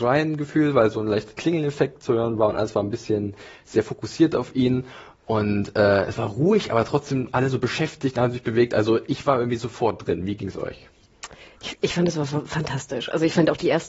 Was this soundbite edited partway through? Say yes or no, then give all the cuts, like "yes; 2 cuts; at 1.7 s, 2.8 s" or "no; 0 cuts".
yes; 1 cut; at 11.8 s